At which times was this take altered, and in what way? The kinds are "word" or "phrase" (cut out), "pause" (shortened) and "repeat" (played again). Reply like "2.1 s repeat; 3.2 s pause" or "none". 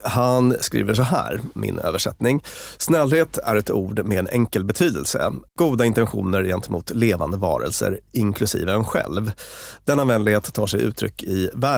5.5 s pause